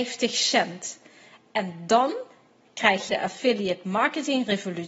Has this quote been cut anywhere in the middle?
yes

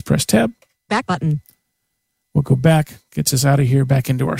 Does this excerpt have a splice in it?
no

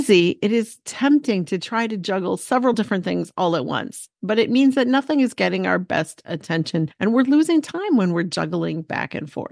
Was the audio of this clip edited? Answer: no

